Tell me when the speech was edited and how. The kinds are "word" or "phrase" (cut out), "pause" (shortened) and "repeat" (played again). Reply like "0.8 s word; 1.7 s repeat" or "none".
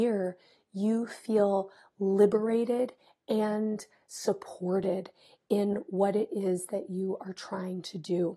none